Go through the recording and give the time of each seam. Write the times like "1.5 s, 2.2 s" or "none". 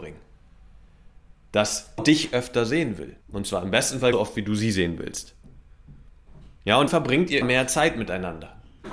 2.0 s, 3.2 s, 4.1 s, 6.9 s, 7.4 s